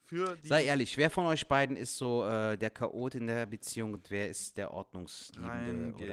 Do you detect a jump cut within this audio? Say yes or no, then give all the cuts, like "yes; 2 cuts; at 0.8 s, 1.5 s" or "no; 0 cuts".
no; 0 cuts